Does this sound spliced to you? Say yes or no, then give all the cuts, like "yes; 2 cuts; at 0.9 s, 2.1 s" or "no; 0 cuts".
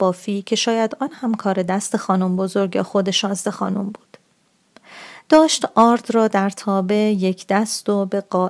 no; 0 cuts